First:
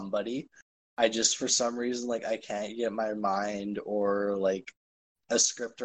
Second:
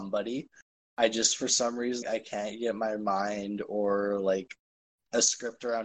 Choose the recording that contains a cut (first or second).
second